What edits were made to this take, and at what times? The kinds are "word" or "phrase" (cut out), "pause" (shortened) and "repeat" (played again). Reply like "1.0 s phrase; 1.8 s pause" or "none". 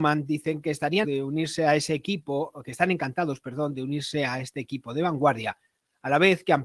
1.0 s word